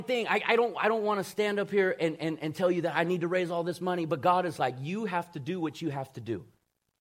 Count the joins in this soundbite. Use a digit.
0